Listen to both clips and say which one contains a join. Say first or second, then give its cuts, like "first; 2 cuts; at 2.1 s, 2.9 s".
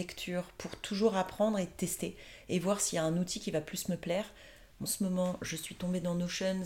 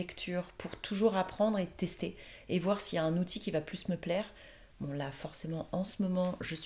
first; 1 cut; at 4.9 s